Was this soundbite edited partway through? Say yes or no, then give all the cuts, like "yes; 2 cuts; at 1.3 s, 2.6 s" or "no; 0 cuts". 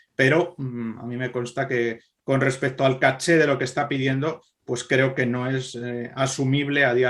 no; 0 cuts